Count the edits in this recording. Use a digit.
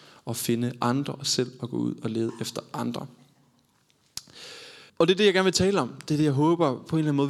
1